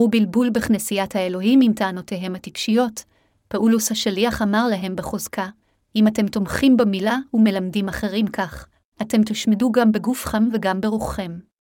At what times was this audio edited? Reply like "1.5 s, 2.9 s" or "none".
none